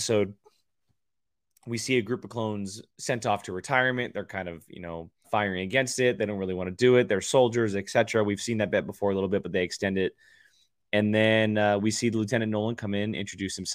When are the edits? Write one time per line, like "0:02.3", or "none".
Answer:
0:05.2